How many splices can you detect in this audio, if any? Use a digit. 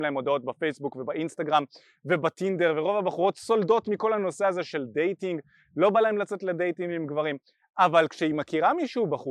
0